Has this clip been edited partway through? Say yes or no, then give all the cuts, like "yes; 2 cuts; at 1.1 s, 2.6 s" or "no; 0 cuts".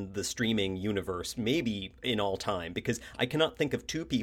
no; 0 cuts